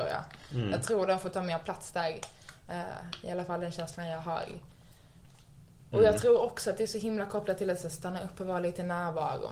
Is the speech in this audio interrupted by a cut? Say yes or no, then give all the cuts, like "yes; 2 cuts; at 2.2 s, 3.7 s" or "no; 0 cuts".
no; 0 cuts